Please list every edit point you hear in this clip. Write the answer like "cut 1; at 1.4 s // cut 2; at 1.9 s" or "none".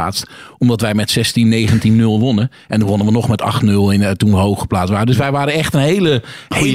none